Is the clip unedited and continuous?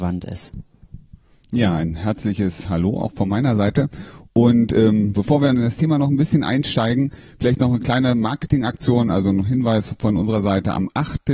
yes; 0 cuts

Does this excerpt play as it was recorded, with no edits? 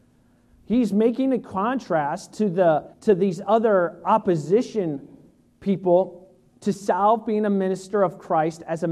no; 2 cuts; at 2.9 s, 6.5 s

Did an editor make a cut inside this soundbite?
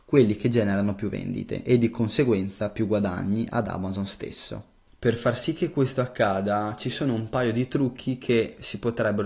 no; 0 cuts

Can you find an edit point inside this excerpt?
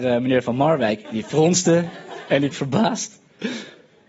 yes; 2 cuts; at 1.0 s, 2.5 s

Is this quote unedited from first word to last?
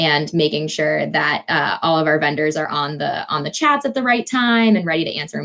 yes; 0 cuts

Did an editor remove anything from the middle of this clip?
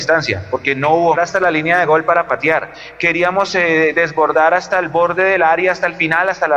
yes; 1 cut; at 1.2 s

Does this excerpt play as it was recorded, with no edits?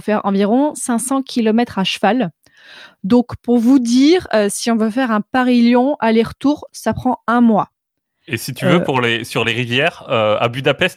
yes; 0 cuts

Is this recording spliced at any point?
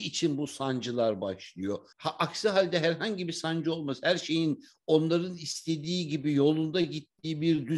yes; 1 cut; at 1.9 s

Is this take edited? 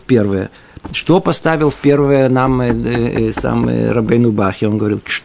no; 0 cuts

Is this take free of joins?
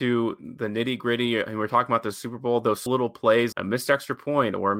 no; 2 cuts; at 2.9 s, 3.5 s

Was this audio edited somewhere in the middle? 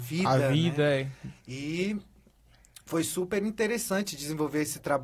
no; 0 cuts

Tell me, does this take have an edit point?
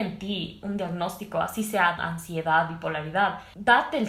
yes; 1 cut; at 2.0 s

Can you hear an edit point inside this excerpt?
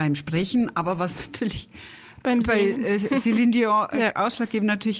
no; 0 cuts

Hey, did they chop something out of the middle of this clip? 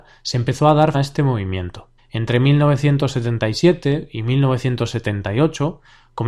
yes; 2 cuts; at 0.9 s, 2.0 s

